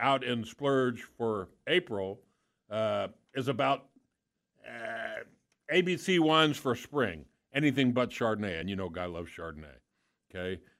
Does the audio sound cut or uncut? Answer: uncut